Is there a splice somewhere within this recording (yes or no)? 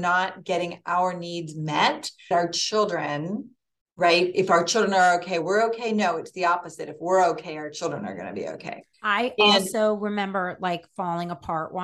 yes